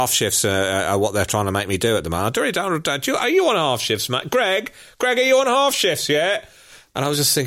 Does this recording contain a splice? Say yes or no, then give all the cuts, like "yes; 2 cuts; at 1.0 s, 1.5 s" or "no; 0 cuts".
no; 0 cuts